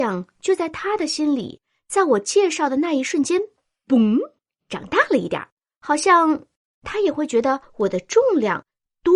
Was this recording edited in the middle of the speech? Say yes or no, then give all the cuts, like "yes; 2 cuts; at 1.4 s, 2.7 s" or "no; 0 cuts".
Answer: no; 0 cuts